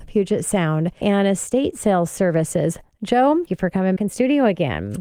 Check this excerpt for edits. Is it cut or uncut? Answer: cut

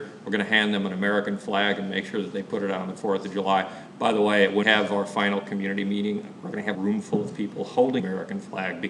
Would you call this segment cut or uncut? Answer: cut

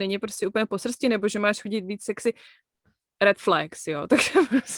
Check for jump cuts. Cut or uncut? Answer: uncut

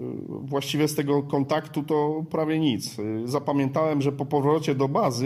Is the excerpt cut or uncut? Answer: uncut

